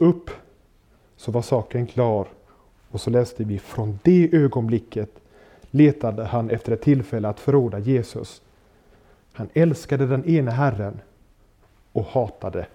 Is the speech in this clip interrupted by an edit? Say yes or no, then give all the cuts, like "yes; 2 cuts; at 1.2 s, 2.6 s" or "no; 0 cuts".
no; 0 cuts